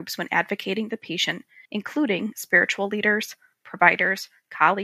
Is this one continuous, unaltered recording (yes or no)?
no